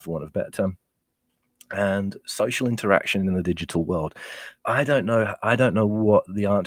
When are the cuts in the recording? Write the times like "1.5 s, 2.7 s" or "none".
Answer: 4.6 s